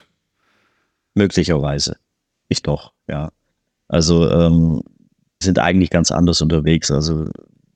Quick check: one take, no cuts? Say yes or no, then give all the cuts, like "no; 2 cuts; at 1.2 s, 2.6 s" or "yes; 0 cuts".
no; 2 cuts; at 2.6 s, 5.4 s